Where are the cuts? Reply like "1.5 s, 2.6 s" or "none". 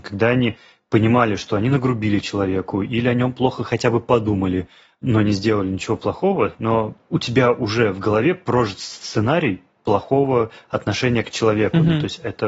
none